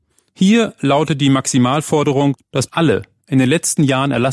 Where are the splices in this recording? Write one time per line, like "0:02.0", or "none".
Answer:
0:02.7